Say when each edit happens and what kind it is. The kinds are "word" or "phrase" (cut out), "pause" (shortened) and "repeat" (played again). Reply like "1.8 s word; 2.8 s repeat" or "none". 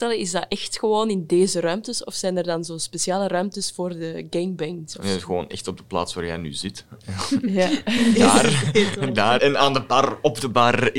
9.4 s word